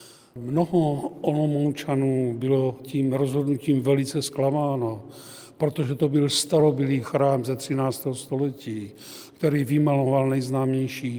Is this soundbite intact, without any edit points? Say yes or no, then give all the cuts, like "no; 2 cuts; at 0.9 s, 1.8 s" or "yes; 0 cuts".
yes; 0 cuts